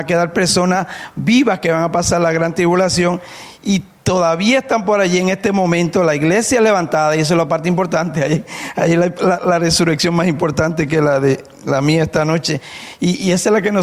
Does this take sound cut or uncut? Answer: uncut